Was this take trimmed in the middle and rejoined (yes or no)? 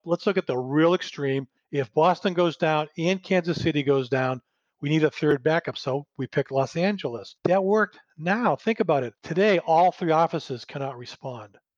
yes